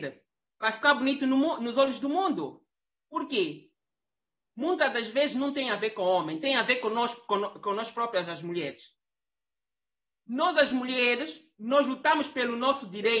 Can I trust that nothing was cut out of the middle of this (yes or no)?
yes